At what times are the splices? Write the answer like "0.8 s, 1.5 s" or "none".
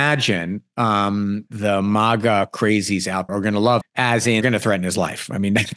1.5 s, 3.3 s, 3.8 s, 4.4 s

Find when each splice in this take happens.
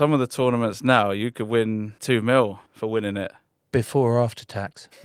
2.0 s, 2.7 s

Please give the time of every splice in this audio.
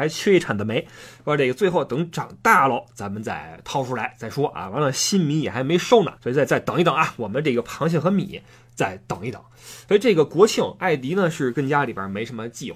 6.2 s

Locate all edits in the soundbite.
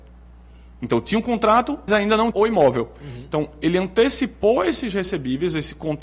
1.9 s, 2.3 s

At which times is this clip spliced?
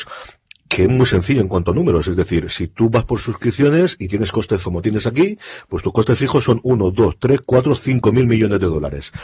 4.6 s

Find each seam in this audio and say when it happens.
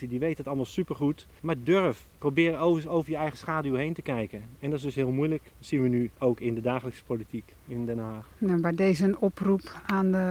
1.4 s, 2.1 s, 6.1 s, 8.3 s

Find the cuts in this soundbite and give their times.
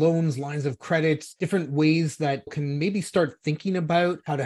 2.5 s

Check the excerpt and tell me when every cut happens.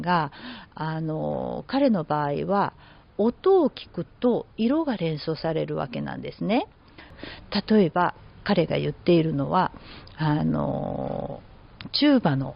none

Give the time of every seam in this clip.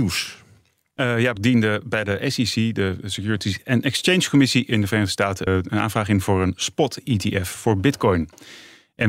1.4 s, 5.5 s

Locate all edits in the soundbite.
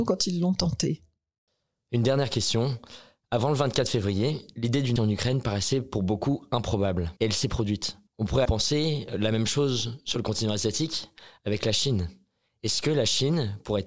5.0 s, 7.2 s, 8.1 s, 8.4 s

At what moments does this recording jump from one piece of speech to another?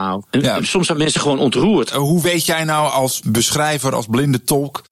none

